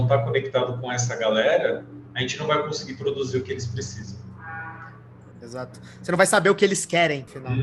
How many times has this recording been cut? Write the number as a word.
zero